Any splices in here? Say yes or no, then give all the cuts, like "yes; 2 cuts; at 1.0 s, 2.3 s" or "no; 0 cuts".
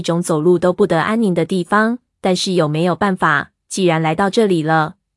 no; 0 cuts